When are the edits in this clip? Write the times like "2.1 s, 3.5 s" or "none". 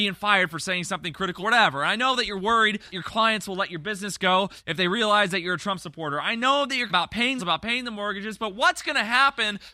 1.4 s, 2.9 s, 6.9 s, 7.4 s